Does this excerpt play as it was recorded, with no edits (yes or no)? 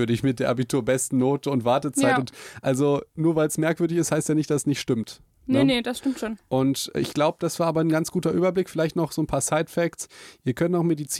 yes